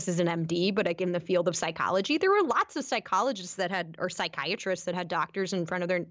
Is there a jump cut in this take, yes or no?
no